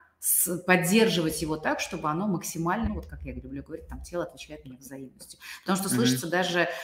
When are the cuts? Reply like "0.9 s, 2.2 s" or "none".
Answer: 2.8 s

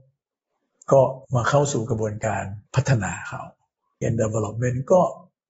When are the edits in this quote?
1.2 s, 2.7 s, 4.0 s

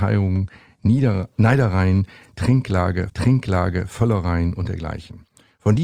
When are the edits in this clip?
3.1 s

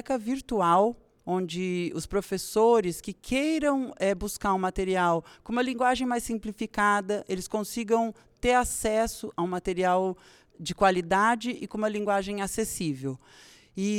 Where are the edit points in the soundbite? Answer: none

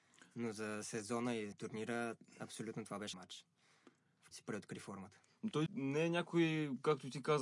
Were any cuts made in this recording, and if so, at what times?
1.5 s, 3.1 s, 4.3 s, 5.7 s

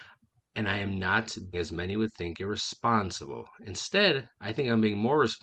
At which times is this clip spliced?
1.5 s, 4.3 s

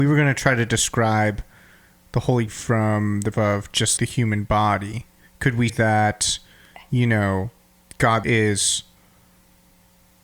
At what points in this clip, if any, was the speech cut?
2.5 s, 3.3 s, 4.0 s, 5.2 s, 5.7 s, 8.2 s

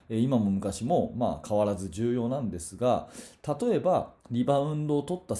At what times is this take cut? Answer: 4.2 s

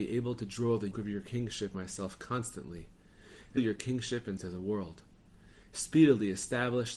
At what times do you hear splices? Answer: 0.9 s, 1.7 s, 3.6 s, 4.4 s

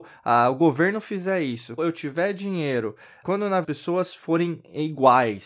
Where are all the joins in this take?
1.8 s, 3.2 s, 3.6 s

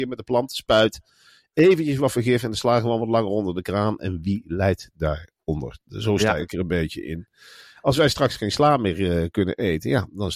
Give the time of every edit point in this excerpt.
none

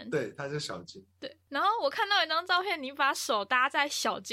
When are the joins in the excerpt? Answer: none

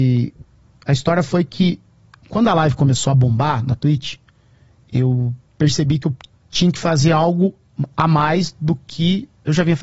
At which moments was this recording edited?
none

